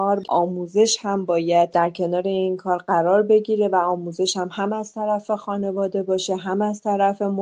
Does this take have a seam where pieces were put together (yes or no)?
no